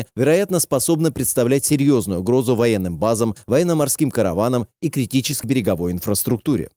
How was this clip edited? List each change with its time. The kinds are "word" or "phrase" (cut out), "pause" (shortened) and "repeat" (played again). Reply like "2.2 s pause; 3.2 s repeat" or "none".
5.4 s word